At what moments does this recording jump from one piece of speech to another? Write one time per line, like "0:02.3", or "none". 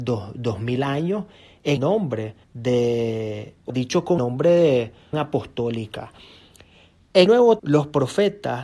0:01.8
0:02.4
0:03.7
0:04.2
0:05.1
0:07.3
0:07.6